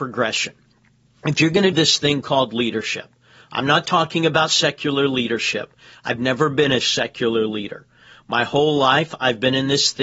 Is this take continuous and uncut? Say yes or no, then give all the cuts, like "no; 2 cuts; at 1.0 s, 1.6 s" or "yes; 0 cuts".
no; 1 cut; at 1.7 s